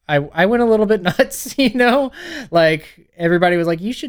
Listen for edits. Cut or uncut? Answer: uncut